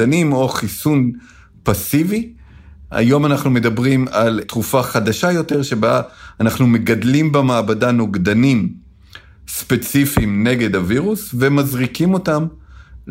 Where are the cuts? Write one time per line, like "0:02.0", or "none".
none